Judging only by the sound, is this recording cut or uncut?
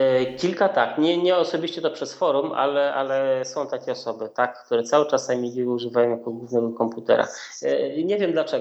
uncut